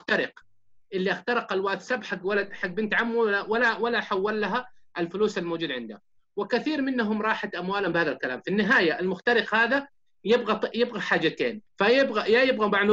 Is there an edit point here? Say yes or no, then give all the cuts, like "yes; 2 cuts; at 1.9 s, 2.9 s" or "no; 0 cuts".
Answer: no; 0 cuts